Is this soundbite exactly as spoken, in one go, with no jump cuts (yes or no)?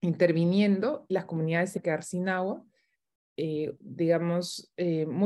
no